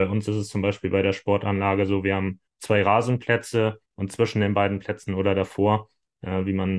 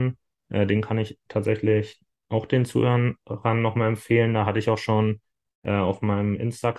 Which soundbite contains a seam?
first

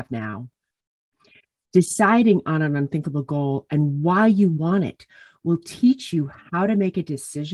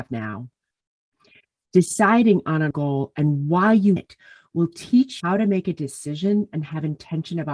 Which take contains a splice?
second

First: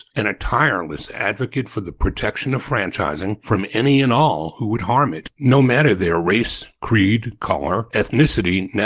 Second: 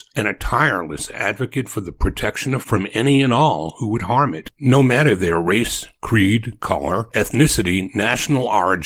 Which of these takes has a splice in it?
second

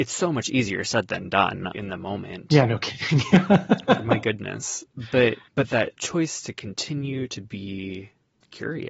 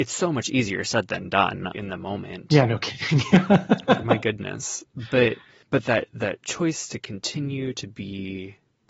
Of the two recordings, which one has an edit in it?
first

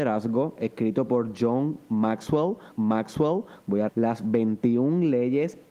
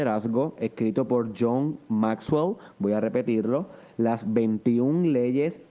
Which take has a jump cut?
first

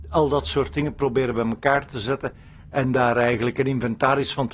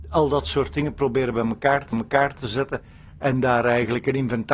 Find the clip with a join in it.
second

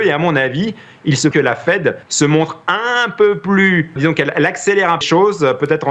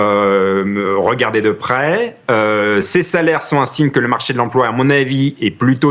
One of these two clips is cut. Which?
first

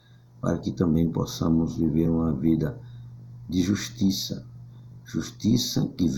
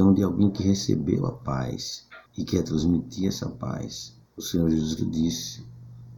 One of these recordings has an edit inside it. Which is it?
second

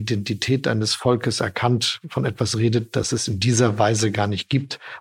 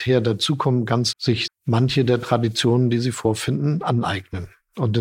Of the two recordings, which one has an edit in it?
second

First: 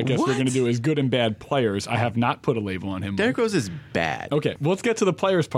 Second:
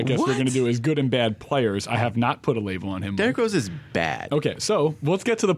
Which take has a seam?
first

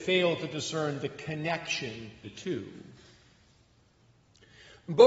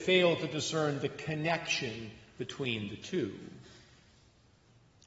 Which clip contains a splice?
first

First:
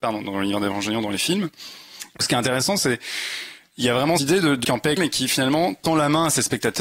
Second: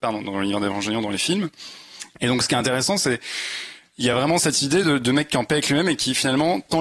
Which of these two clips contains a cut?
first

